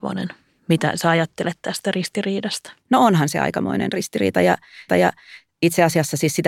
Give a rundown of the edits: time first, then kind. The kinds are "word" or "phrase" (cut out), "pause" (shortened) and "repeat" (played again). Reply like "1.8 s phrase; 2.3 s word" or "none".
2.8 s pause; 4.9 s repeat